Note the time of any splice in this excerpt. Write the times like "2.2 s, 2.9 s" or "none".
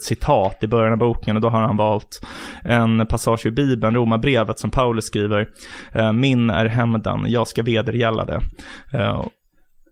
none